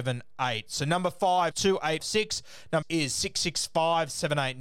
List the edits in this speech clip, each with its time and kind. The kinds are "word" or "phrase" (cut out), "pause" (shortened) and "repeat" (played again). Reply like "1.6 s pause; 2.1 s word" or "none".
1.5 s word; 2.0 s phrase; 2.8 s word